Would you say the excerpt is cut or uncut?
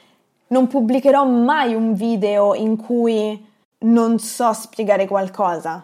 uncut